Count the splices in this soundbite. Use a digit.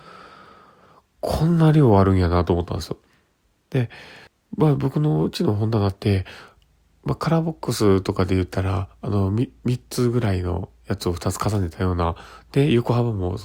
1